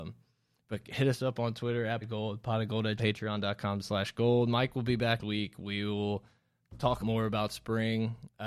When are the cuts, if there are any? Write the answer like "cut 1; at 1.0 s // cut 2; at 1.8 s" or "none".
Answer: cut 1; at 2.0 s // cut 2; at 3.0 s // cut 3; at 5.2 s // cut 4; at 7.0 s